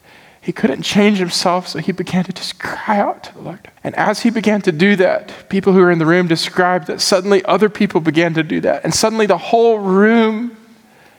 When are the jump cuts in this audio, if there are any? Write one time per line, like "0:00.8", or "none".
0:03.8